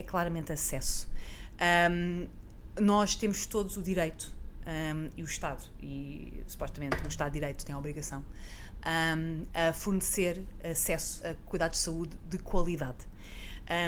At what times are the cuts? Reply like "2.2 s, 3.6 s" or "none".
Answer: 11.2 s